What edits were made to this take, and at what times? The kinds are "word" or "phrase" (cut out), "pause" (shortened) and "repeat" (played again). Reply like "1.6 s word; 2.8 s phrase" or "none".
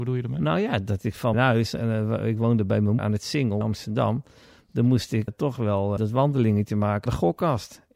1.3 s word; 3.0 s word; 3.6 s word; 5.3 s word; 6.0 s word; 7.1 s word